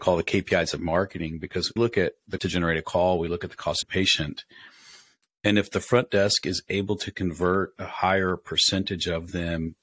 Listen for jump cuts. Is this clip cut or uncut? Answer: cut